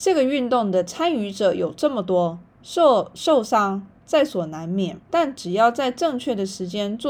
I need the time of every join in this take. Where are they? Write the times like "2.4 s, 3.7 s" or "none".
2.5 s, 5.0 s